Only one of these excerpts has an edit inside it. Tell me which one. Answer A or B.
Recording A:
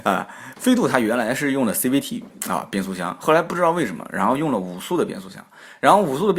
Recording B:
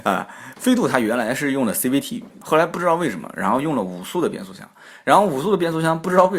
B